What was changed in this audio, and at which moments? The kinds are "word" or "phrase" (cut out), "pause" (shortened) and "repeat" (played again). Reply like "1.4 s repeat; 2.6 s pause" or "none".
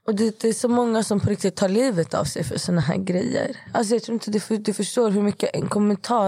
none